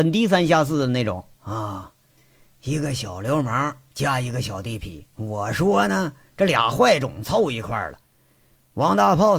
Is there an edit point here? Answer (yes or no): yes